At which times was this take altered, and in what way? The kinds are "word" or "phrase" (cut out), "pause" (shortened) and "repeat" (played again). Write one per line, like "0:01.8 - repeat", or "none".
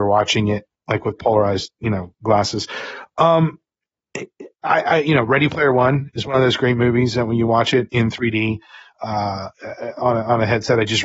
none